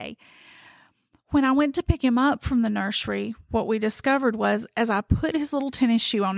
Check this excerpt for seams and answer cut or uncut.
uncut